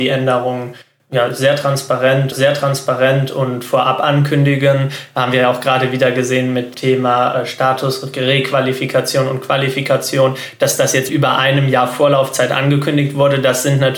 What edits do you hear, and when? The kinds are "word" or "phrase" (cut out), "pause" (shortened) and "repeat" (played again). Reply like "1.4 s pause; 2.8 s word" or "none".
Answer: 2.3 s repeat; 6.7 s word; 11.1 s word